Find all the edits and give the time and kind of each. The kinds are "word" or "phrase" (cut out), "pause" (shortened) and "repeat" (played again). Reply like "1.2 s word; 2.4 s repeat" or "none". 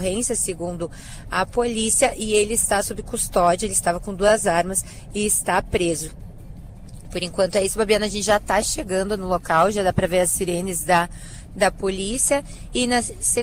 none